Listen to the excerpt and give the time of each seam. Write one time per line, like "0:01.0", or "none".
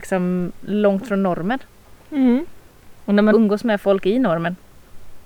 0:03.3